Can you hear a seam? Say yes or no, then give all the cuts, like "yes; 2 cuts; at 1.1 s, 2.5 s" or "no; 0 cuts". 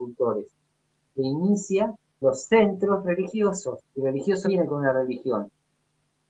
yes; 3 cuts; at 2.2 s, 3.9 s, 4.5 s